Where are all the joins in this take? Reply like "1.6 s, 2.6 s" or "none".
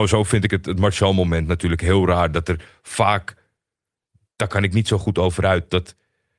none

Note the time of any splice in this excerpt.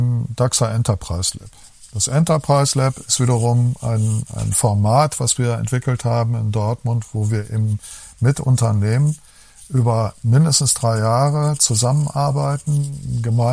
none

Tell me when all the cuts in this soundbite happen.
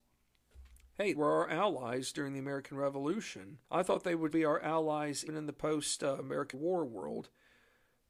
1.1 s, 3.6 s, 4.3 s, 5.3 s, 6.5 s

